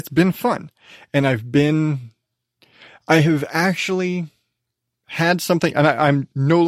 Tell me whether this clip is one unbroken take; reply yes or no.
yes